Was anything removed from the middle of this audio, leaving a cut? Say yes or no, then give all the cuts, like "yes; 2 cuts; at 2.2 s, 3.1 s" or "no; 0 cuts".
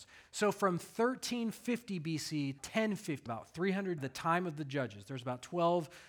yes; 3 cuts; at 2.6 s, 3.3 s, 4.0 s